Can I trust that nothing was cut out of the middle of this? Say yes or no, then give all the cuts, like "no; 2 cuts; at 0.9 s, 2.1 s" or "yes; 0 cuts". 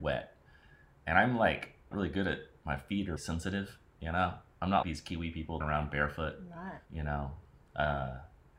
no; 5 cuts; at 1.9 s, 3.2 s, 4.8 s, 5.6 s, 6.8 s